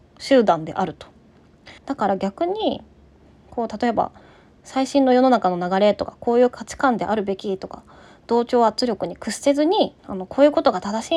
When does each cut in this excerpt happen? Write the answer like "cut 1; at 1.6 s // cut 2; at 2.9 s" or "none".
cut 1; at 1.8 s // cut 2; at 10.0 s

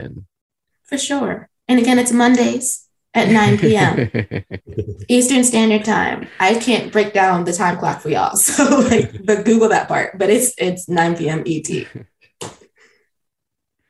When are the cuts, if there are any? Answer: none

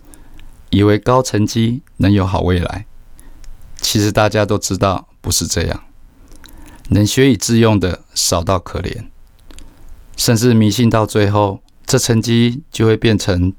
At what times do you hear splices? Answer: cut 1; at 11.7 s

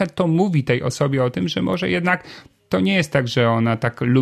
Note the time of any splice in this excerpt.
none

